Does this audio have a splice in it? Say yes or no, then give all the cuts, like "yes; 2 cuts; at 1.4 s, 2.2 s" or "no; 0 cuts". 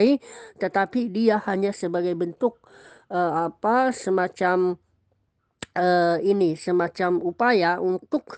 no; 0 cuts